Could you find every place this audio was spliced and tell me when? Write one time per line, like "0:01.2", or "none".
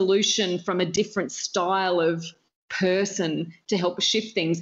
none